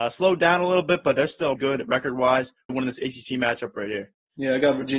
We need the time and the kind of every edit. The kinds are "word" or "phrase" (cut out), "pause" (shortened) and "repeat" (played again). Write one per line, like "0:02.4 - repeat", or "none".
0:01.6 - word
0:02.7 - phrase